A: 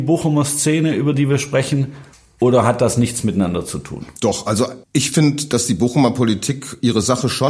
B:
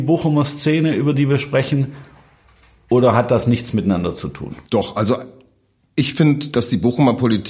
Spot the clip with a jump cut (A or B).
A